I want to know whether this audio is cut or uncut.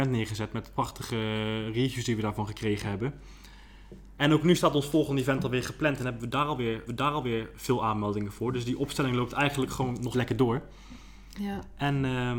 cut